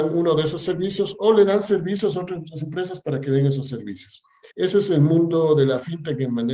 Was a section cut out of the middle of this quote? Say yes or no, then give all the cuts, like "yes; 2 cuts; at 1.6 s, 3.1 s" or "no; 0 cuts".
yes; 1 cut; at 4.5 s